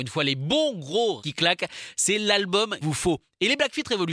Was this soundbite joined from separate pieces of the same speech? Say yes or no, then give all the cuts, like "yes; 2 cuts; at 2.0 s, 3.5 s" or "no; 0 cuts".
yes; 2 cuts; at 1.2 s, 2.8 s